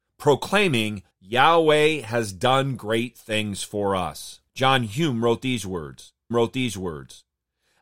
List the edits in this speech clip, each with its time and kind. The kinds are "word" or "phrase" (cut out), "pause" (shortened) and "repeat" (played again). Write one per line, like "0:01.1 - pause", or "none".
0:01.1 - pause
0:04.5 - pause
0:06.3 - repeat